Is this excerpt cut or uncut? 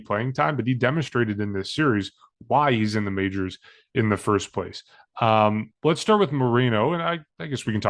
uncut